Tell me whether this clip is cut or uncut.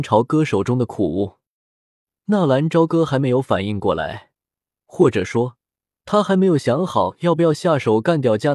uncut